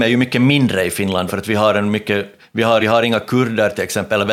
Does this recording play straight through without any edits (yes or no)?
no